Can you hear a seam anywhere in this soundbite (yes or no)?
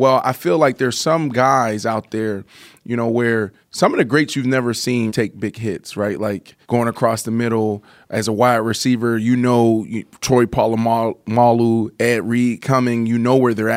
yes